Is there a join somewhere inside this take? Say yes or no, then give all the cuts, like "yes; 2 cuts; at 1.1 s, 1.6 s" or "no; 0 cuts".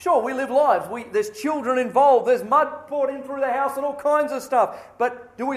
no; 0 cuts